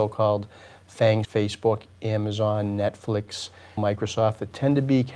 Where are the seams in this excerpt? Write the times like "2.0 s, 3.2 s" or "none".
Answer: 1.2 s, 3.8 s